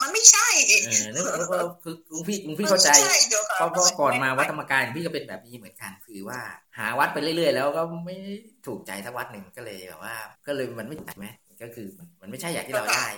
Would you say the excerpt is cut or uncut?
cut